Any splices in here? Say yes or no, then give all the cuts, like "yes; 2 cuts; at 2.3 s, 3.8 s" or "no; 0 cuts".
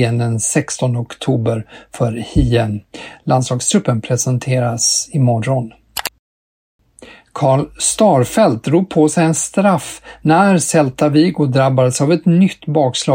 no; 0 cuts